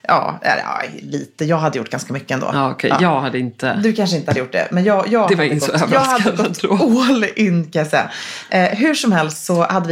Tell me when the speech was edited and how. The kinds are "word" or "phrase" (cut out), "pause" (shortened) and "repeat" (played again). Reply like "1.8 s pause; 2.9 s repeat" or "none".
none